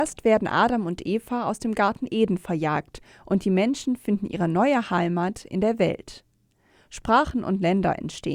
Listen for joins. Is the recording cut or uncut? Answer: uncut